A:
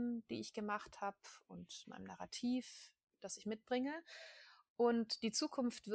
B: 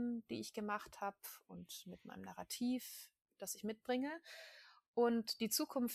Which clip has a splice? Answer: A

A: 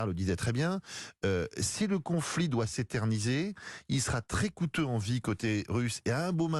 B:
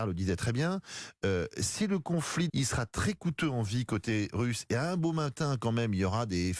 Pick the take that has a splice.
B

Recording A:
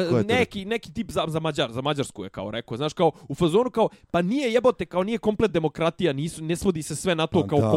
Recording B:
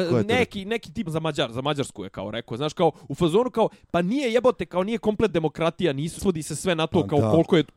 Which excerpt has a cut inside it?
B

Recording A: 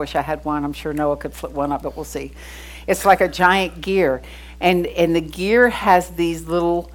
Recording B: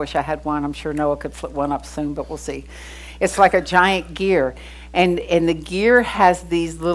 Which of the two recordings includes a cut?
A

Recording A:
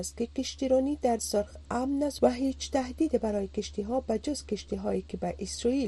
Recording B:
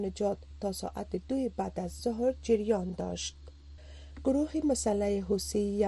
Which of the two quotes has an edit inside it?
A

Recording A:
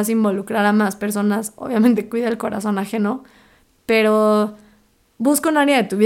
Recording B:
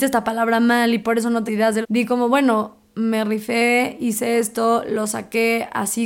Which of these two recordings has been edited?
B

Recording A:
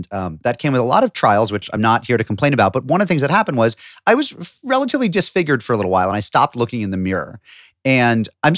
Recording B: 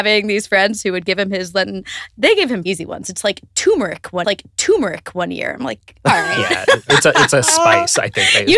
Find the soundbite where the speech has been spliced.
B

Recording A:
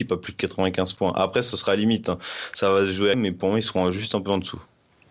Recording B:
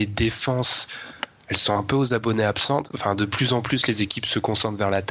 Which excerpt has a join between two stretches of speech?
A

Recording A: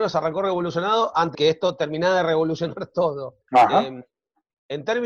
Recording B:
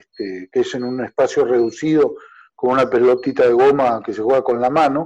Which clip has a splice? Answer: A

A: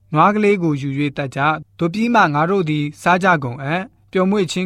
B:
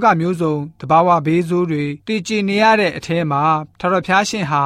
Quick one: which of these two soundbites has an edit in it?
B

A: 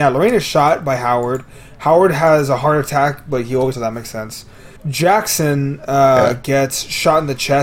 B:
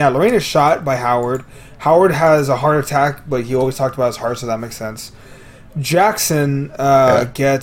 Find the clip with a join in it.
A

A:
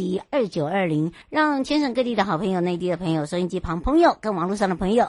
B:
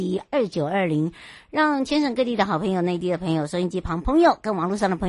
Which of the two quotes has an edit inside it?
A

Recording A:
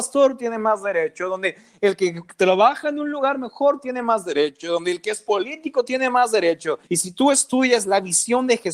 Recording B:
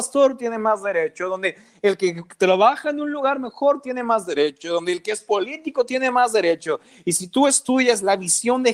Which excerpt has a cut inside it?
A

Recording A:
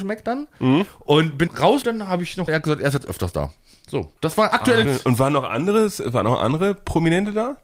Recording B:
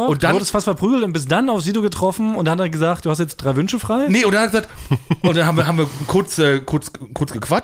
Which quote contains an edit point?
A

